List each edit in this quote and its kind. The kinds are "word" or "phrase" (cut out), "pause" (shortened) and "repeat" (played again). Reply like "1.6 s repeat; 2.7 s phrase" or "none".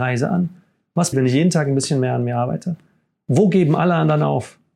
1.1 s word